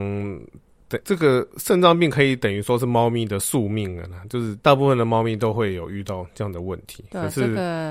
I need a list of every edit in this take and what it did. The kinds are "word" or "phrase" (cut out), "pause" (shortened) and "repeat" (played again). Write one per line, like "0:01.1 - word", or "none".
0:01.0 - word
0:04.6 - pause